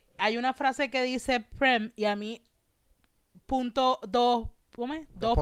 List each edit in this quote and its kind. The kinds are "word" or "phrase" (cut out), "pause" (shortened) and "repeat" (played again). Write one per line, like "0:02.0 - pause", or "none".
none